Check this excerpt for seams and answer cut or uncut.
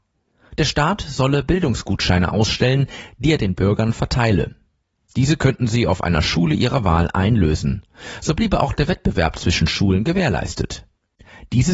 uncut